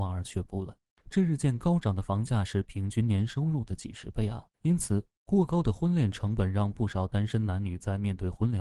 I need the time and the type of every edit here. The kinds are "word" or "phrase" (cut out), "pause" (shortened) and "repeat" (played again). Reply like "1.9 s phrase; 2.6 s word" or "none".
4.5 s pause